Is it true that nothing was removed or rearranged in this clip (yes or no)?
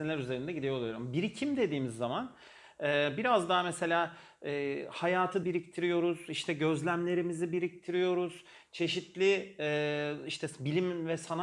no